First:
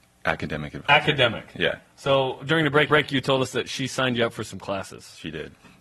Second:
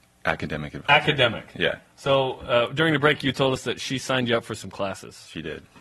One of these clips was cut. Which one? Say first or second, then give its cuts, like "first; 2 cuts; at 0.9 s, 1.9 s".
first; 2 cuts; at 2.4 s, 2.9 s